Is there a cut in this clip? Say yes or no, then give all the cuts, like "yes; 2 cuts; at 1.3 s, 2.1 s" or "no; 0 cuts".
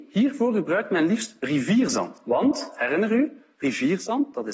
yes; 1 cut; at 3.5 s